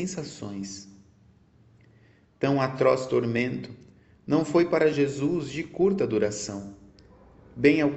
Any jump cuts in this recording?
no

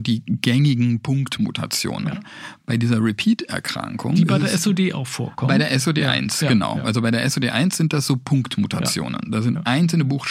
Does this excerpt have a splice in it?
no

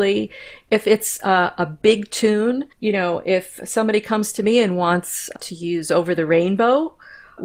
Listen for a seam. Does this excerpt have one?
yes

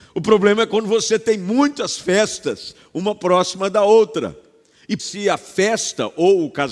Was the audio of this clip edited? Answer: yes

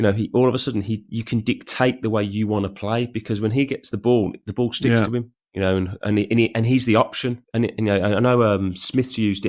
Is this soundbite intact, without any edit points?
yes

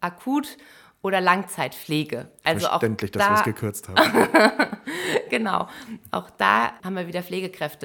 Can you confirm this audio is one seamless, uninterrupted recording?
yes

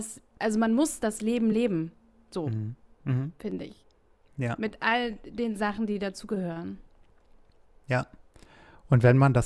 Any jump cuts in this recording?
no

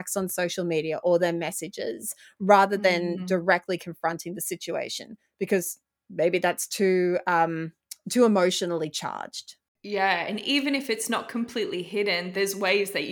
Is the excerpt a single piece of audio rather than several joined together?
yes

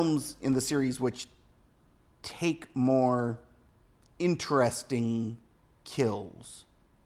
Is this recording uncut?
yes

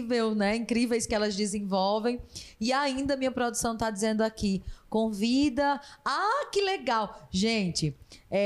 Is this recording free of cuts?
yes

